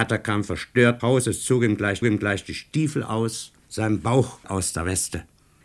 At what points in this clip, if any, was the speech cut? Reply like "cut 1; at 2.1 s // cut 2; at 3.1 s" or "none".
cut 1; at 1.0 s // cut 2; at 2.0 s // cut 3; at 3.6 s // cut 4; at 4.4 s

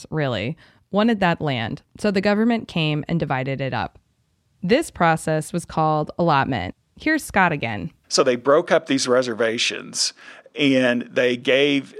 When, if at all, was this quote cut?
cut 1; at 8.0 s

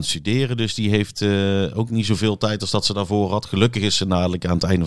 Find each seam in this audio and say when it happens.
none

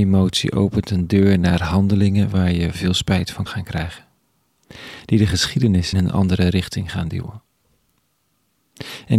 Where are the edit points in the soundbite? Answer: cut 1; at 2.7 s // cut 2; at 3.5 s // cut 3; at 5.9 s

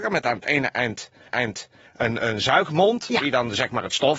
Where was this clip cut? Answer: cut 1; at 1.3 s

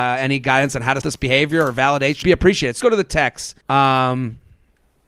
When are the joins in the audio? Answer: cut 1; at 1.0 s // cut 2; at 2.2 s // cut 3; at 2.8 s // cut 4; at 3.6 s

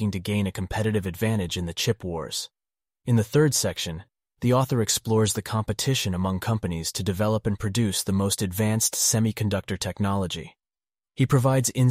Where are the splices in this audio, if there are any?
none

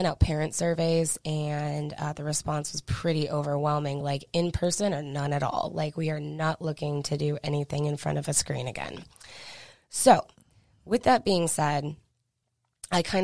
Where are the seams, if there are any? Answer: none

